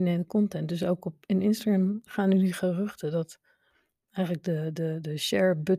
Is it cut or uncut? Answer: uncut